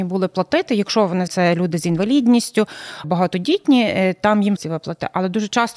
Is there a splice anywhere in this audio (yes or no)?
yes